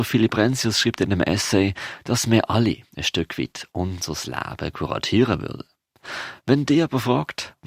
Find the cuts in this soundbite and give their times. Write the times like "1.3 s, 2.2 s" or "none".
2.9 s